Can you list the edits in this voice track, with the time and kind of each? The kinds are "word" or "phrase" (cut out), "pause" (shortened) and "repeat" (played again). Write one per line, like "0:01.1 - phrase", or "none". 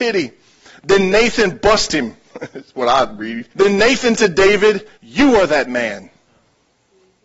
0:03.5 - pause
0:04.1 - word
0:05.0 - pause